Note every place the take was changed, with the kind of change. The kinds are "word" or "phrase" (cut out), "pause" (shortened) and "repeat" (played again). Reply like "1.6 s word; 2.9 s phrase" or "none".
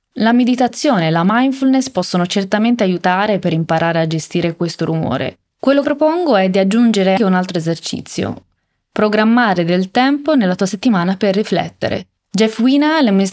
5.5 s pause; 5.8 s word; 7.2 s word; 12.2 s pause